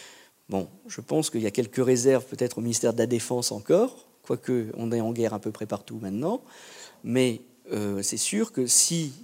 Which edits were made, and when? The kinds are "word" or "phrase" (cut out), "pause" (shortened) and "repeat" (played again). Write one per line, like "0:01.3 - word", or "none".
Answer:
none

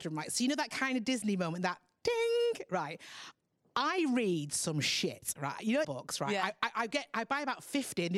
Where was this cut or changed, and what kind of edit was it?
0:05.8 - phrase

